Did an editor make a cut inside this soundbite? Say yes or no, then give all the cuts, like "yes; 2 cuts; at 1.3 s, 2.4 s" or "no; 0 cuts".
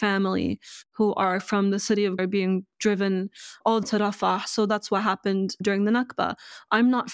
yes; 2 cuts; at 2.2 s, 3.8 s